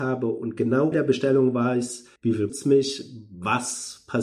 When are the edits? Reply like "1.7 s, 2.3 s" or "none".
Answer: 0.9 s, 2.2 s, 2.5 s